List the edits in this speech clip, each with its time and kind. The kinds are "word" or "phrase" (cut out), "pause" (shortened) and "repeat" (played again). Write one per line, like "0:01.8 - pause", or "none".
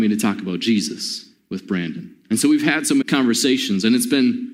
0:02.2 - pause
0:03.0 - word